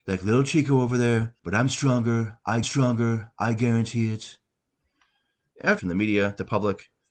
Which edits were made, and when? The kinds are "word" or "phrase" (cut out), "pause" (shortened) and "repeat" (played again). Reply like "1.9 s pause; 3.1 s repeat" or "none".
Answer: 1.4 s pause; 2.6 s repeat; 5.8 s phrase